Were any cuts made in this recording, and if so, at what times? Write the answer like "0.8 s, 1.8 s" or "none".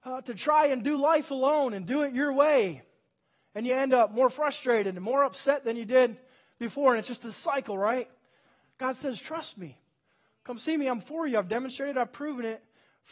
none